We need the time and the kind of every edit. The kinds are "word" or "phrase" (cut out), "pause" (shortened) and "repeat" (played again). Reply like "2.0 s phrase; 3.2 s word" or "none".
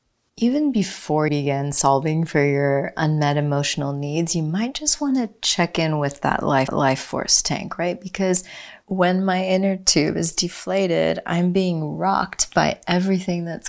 1.3 s word; 6.7 s repeat

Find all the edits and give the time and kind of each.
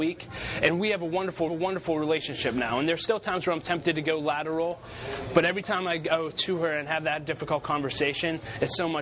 1.5 s repeat

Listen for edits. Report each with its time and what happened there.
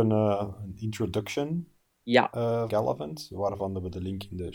2.7 s word

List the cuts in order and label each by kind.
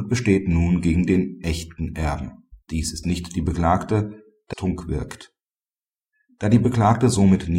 2.6 s pause; 3.0 s word; 4.5 s phrase

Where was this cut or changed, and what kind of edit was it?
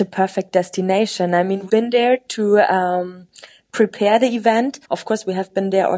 1.7 s word; 4.8 s pause

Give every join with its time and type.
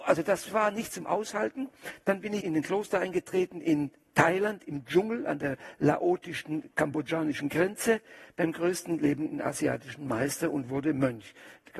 2.4 s word

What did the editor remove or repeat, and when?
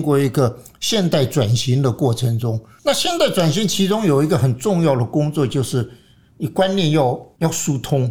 none

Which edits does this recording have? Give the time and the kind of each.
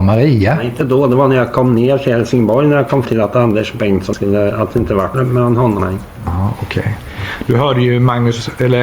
3.1 s word; 4.1 s word; 5.1 s phrase; 5.8 s word

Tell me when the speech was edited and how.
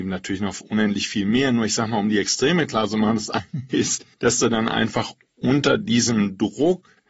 4.1 s pause

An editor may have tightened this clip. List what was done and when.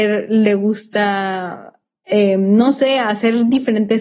none

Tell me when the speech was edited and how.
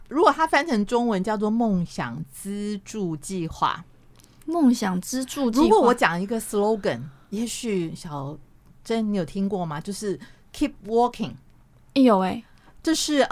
none

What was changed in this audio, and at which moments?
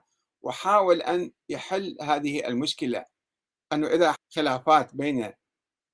4.1 s word

